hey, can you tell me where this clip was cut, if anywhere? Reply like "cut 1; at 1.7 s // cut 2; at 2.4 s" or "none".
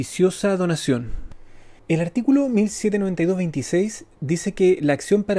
cut 1; at 1.8 s

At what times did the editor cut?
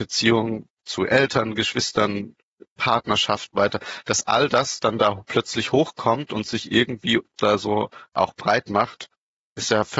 cut 1; at 3.5 s // cut 2; at 7.4 s // cut 3; at 8.1 s

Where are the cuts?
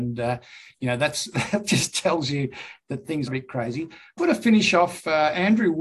cut 1; at 3.3 s // cut 2; at 4.2 s

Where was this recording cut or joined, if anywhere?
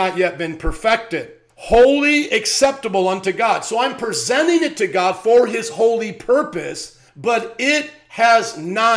cut 1; at 1.5 s // cut 2; at 7.1 s

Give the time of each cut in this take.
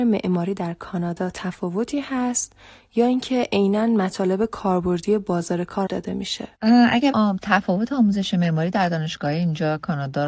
cut 1; at 5.9 s // cut 2; at 6.5 s // cut 3; at 7.1 s

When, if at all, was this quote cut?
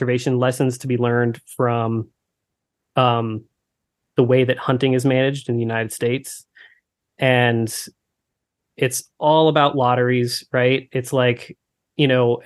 none

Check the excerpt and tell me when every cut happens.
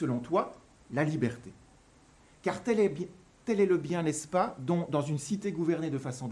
none

